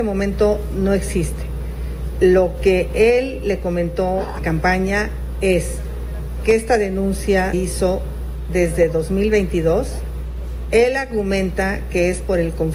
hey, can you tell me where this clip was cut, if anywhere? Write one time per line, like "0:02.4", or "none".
0:04.4
0:07.5